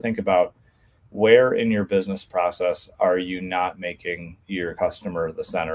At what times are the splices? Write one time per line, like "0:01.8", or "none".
0:04.4